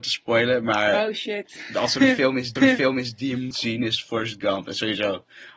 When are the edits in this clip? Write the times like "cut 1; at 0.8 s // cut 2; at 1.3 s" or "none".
cut 1; at 2.6 s // cut 2; at 3.5 s